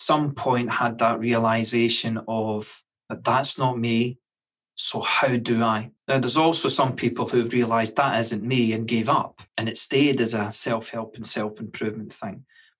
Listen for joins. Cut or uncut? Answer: cut